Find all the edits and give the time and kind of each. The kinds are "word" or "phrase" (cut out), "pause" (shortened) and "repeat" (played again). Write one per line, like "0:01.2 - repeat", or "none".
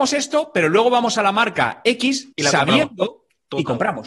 0:02.3 - pause